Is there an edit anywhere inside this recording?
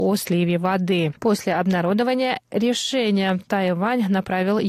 yes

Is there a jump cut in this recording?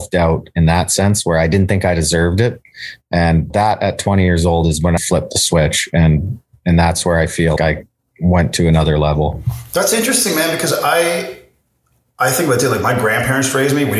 yes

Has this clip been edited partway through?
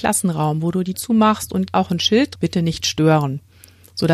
yes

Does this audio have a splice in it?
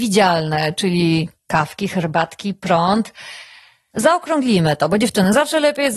no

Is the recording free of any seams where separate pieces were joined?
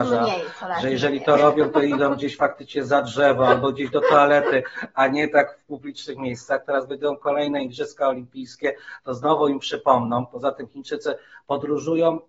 yes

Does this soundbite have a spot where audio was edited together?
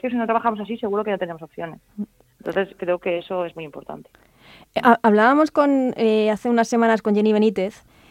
no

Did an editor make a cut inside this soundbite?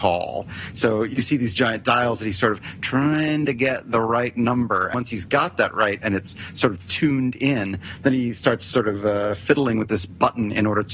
yes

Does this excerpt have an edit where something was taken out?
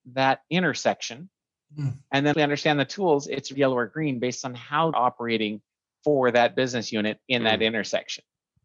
yes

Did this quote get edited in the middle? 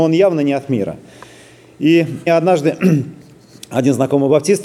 yes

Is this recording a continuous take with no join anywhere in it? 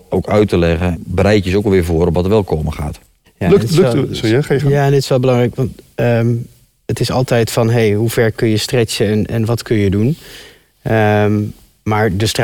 yes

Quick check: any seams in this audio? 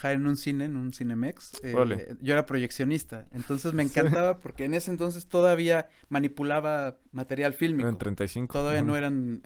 yes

